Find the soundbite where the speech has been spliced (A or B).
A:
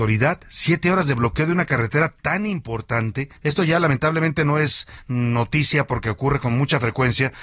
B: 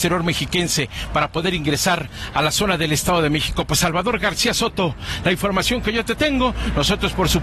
A